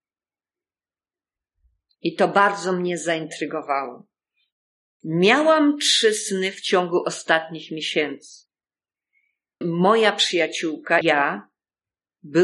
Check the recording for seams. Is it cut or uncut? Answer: cut